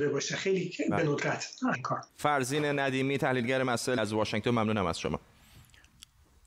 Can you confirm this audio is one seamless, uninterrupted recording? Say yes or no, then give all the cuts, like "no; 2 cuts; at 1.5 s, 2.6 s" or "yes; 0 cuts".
no; 3 cuts; at 1.7 s, 2.1 s, 4.0 s